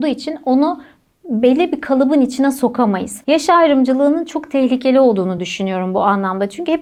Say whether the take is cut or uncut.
uncut